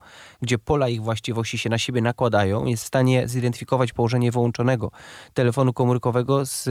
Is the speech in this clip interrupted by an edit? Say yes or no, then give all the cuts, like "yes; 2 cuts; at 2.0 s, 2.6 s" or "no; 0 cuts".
no; 0 cuts